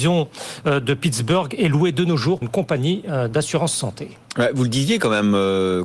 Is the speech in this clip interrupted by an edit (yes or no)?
yes